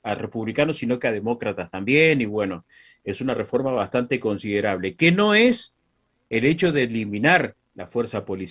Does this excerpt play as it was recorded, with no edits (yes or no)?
yes